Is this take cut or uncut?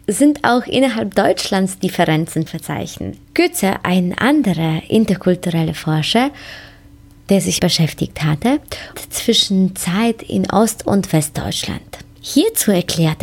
cut